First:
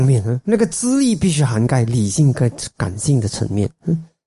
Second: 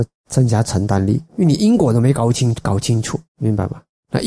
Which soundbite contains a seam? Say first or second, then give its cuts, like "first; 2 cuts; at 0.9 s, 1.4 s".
second; 2 cuts; at 1.3 s, 3.3 s